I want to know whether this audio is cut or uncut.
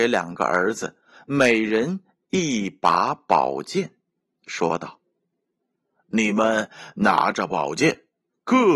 uncut